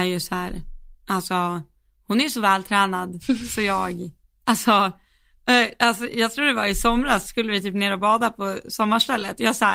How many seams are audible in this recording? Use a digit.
1